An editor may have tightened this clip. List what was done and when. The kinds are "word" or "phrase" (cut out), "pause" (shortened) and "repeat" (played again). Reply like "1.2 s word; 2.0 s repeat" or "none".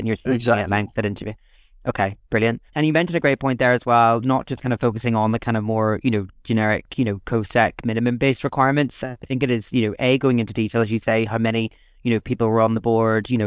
2.7 s pause